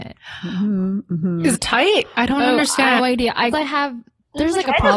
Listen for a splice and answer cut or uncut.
cut